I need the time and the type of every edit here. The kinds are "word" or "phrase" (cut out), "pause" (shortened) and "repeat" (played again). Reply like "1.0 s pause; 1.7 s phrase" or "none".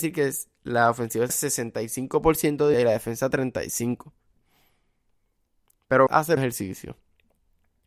1.3 s word; 2.7 s word; 6.1 s word; 6.4 s word

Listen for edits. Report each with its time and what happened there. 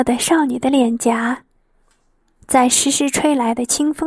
none

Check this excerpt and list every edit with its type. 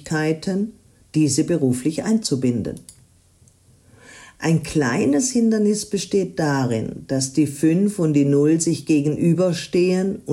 none

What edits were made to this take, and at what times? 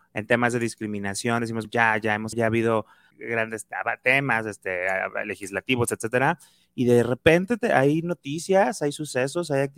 1.6 s word; 2.3 s word; 3.1 s word

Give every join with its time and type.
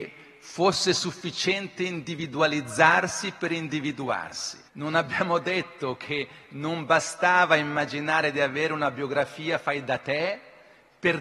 4.7 s pause

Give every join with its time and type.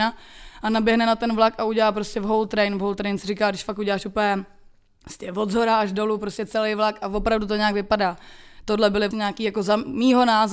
9.1 s word

